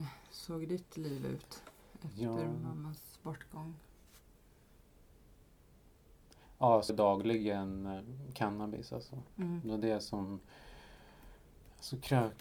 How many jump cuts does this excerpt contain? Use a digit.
2